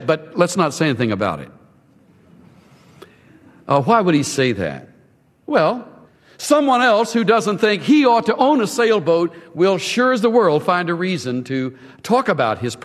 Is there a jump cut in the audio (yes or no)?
no